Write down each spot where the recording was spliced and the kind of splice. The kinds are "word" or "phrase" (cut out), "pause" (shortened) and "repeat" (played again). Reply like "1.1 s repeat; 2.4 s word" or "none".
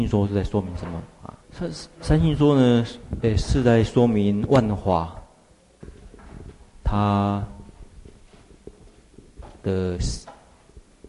1.4 s pause